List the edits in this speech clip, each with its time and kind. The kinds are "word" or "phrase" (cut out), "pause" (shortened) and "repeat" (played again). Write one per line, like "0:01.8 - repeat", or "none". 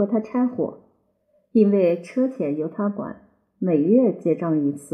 none